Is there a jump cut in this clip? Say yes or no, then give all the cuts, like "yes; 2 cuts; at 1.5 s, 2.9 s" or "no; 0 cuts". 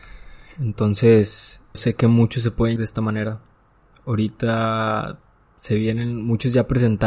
yes; 2 cuts; at 1.7 s, 2.8 s